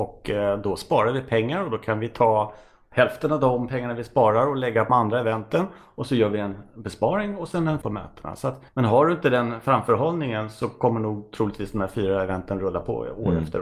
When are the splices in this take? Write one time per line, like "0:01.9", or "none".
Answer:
0:04.9
0:07.8
0:08.7